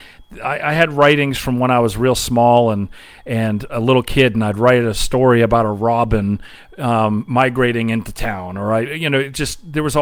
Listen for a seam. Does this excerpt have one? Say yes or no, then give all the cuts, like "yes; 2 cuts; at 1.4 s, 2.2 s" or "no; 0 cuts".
no; 0 cuts